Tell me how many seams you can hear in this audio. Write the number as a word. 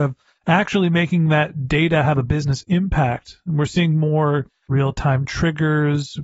zero